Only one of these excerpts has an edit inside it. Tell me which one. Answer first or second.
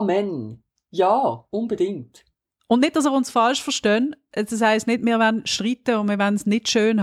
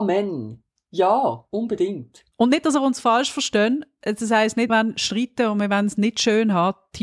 second